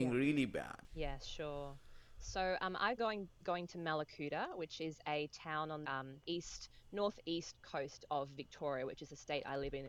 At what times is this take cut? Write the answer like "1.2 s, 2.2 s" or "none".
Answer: 3.0 s, 5.8 s, 6.2 s